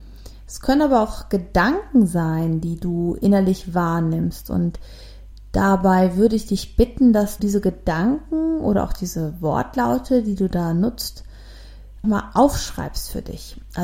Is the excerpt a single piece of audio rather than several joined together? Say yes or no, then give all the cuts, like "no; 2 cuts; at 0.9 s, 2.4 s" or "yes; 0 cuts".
no; 2 cuts; at 7.4 s, 12.0 s